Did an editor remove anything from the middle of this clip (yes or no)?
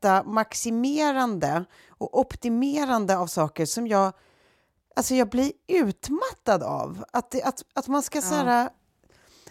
no